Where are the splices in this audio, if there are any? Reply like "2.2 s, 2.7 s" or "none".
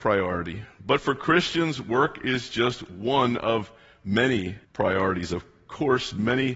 4.6 s